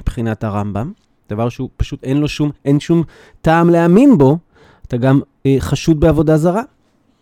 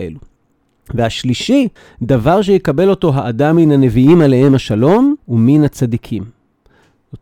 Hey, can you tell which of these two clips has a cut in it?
second; 2 cuts; at 1.8 s, 5.2 s

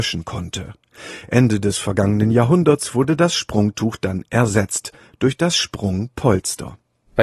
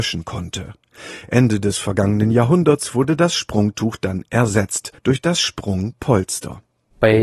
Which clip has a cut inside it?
second; 1 cut; at 5.0 s

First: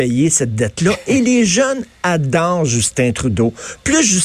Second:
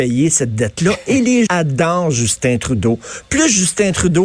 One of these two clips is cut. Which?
second; 1 cut; at 1.5 s

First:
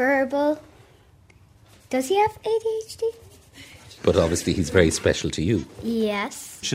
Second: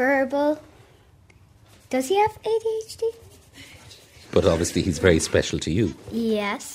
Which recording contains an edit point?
first; 1 cut; at 4.0 s

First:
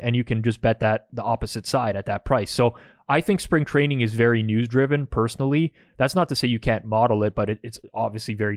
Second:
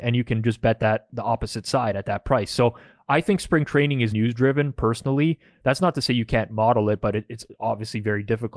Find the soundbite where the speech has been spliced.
second; 1 cut; at 4.1 s

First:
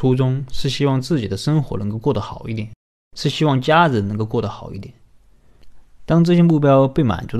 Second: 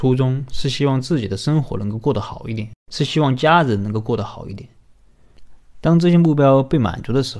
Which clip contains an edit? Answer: second; 1 cut; at 2.8 s

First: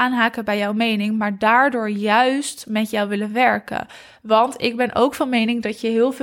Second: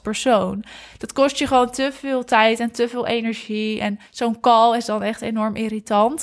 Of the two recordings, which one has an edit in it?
second; 1 cut; at 4.1 s

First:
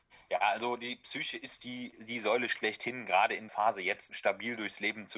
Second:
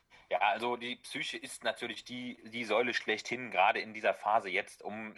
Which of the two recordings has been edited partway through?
first; 3 cuts; at 1.6 s, 3.5 s, 4.1 s

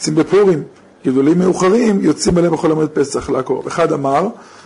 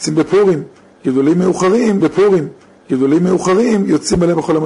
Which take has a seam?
second; 1 cut; at 2.0 s

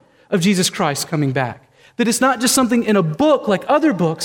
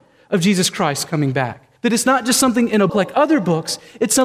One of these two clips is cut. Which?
second; 2 cuts; at 1.8 s, 2.9 s

